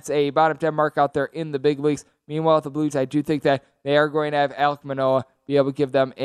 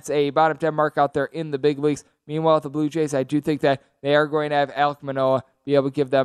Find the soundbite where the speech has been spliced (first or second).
first